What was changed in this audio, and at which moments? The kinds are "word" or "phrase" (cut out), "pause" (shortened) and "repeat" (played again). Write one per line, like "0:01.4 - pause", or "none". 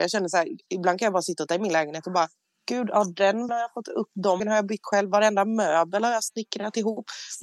0:01.5 - word
0:03.5 - word
0:04.4 - word
0:04.8 - word